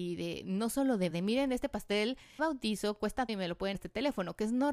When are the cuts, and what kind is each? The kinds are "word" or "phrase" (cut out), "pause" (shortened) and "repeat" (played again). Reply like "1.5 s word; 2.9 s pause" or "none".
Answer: 1.1 s word; 2.4 s word; 3.3 s word; 3.7 s word